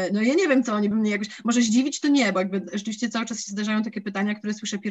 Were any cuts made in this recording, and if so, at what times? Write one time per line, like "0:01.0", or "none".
0:00.9